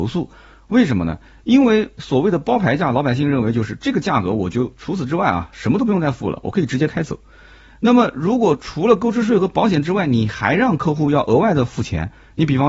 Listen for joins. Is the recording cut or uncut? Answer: uncut